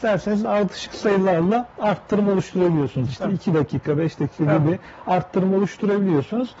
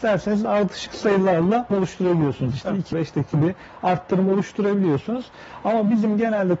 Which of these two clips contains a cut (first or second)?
second